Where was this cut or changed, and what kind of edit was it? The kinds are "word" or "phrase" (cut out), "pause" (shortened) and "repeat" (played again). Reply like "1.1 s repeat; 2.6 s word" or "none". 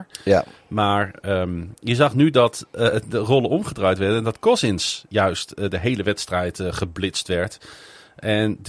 none